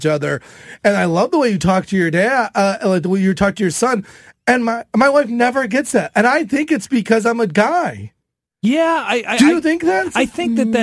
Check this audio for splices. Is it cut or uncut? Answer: uncut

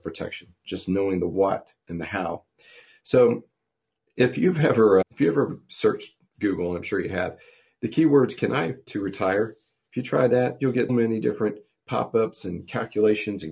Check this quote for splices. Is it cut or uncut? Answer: cut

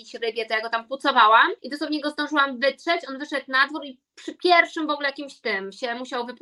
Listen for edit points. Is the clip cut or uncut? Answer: cut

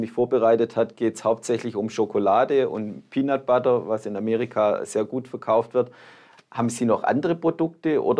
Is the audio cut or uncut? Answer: uncut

